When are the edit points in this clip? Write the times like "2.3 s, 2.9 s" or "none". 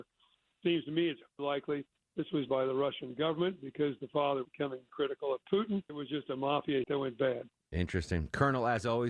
1.4 s, 2.5 s, 4.4 s, 4.9 s, 5.9 s, 6.8 s